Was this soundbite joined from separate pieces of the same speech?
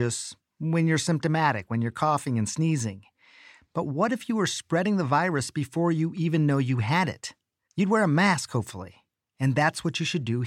no; 0 cuts

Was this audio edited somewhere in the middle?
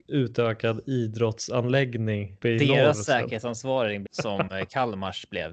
yes; 2 cuts; at 2.4 s, 4.1 s

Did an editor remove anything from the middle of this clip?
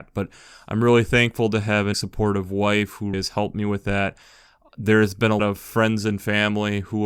yes; 3 cuts; at 1.9 s, 3.1 s, 5.4 s

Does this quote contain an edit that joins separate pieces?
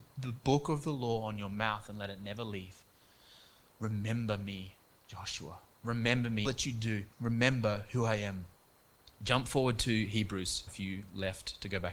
yes; 3 cuts; at 6.4 s, 7.1 s, 10.7 s

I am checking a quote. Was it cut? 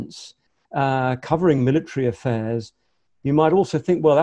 no; 0 cuts

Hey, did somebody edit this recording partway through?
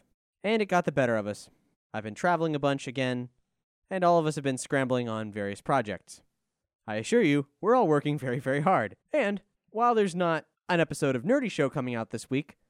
yes; 1 cut; at 9.0 s

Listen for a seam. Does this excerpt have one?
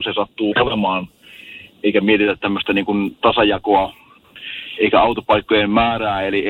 no; 0 cuts

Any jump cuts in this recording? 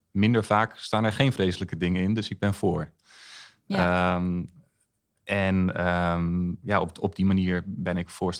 no; 0 cuts

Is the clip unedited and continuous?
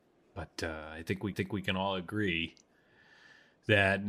no; 1 cut; at 1.3 s

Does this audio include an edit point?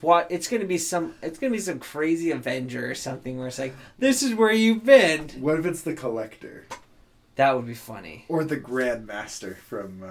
no; 0 cuts

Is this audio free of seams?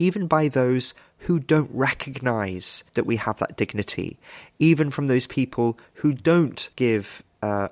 no; 2 cuts; at 2.9 s, 6.7 s

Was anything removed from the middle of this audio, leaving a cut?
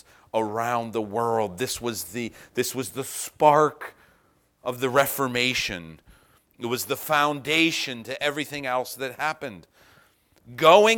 no; 0 cuts

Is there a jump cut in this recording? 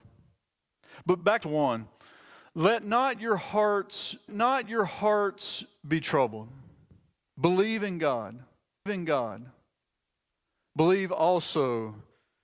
yes; 3 cuts; at 1.4 s, 4.3 s, 8.9 s

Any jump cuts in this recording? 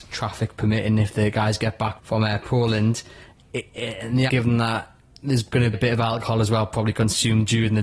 yes; 3 cuts; at 2.0 s, 4.3 s, 5.7 s

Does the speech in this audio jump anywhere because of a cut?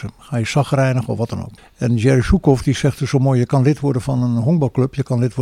yes; 1 cut; at 1.6 s

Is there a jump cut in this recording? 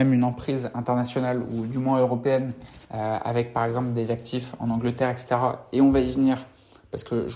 yes; 1 cut; at 2.8 s

